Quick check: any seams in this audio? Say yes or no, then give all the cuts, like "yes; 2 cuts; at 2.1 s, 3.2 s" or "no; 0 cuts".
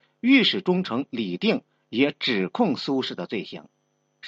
no; 0 cuts